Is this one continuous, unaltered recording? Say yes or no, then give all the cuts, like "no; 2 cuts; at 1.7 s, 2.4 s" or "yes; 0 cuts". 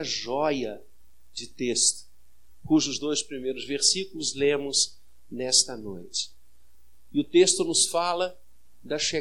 yes; 0 cuts